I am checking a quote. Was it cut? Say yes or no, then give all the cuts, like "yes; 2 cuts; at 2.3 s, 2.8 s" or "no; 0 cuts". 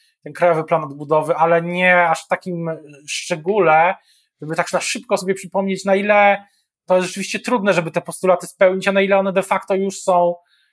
no; 0 cuts